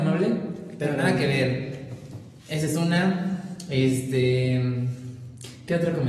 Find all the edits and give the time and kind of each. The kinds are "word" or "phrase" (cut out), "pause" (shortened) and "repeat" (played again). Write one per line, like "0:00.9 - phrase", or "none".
0:02.4 - pause